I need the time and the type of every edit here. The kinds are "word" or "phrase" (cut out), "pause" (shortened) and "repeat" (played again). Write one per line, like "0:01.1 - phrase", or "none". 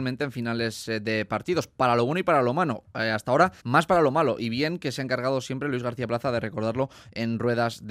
0:03.6 - pause

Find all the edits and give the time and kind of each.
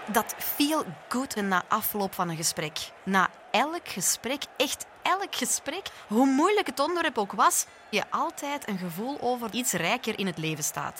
0:01.4 - word
0:03.0 - pause
0:07.9 - word
0:09.5 - phrase

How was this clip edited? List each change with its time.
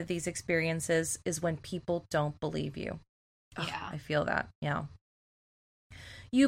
none

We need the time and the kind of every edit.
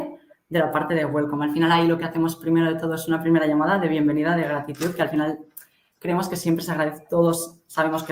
none

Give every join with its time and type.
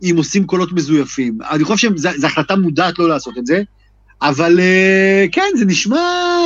none

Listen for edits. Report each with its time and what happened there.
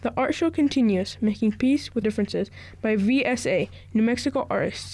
0:02.0 - word

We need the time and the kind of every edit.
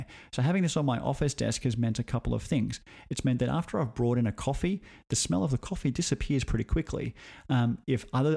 none

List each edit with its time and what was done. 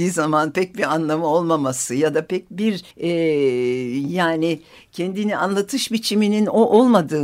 0:02.9 - pause

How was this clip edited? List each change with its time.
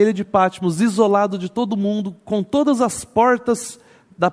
none

